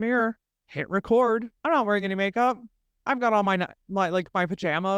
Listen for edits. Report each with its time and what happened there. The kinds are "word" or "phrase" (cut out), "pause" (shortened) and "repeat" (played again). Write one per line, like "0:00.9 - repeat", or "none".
none